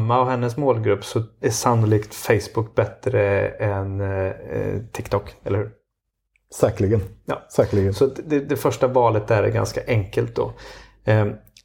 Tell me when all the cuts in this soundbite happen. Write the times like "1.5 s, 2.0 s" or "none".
none

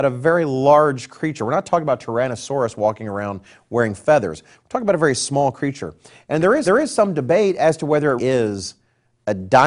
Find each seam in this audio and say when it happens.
6.6 s, 8.2 s

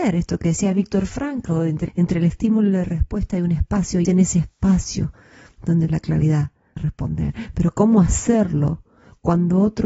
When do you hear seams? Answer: 1.9 s, 4.0 s, 5.9 s, 6.8 s

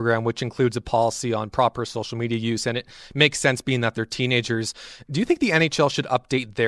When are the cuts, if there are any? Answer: none

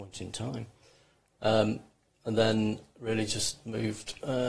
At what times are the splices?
none

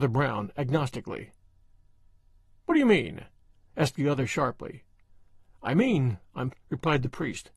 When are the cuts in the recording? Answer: 6.5 s

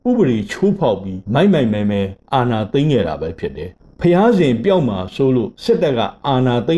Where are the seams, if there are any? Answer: 1.2 s, 5.5 s

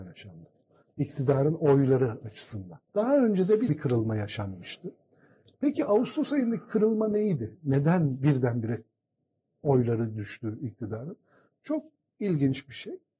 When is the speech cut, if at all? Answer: 2.9 s, 3.7 s

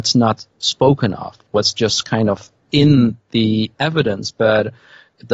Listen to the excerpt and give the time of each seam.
none

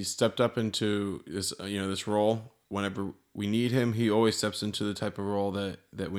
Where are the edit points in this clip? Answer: none

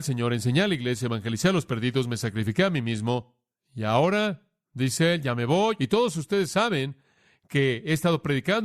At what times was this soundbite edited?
none

